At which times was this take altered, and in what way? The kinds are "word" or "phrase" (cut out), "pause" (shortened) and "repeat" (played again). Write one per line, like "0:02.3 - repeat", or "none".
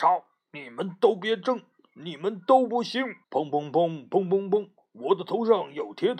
0:03.2 - pause